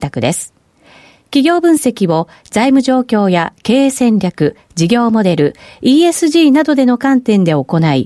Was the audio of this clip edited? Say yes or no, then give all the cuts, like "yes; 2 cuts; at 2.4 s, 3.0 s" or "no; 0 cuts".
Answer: no; 0 cuts